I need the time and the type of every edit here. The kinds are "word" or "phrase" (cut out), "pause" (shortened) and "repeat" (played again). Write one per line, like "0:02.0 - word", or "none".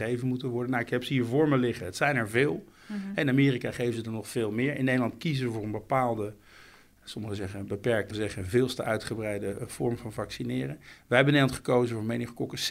0:08.1 - word